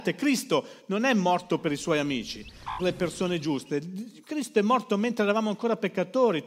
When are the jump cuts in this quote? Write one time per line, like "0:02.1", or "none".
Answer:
0:02.8